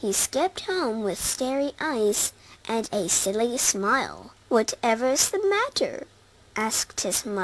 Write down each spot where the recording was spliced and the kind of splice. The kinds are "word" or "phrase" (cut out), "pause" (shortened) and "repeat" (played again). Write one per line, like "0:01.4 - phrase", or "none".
0:04.4 - pause